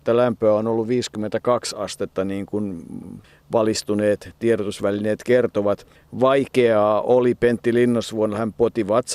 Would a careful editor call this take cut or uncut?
uncut